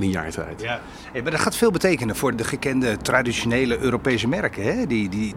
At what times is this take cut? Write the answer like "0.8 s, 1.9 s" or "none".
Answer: 2.3 s